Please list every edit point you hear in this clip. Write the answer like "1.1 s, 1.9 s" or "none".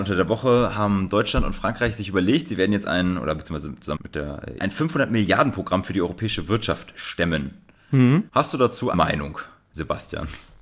4.0 s, 4.6 s, 8.3 s, 8.9 s